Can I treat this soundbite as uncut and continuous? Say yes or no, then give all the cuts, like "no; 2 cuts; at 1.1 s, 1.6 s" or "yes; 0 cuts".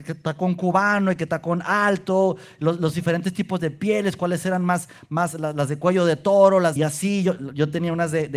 no; 1 cut; at 6.8 s